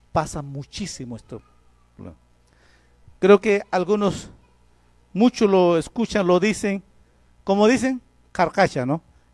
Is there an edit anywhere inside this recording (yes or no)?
no